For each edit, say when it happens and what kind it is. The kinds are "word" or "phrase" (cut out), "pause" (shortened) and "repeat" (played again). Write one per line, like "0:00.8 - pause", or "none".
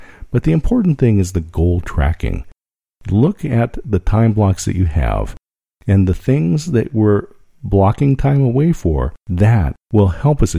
none